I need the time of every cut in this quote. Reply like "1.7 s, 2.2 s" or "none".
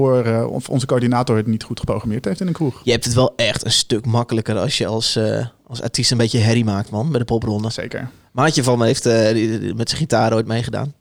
none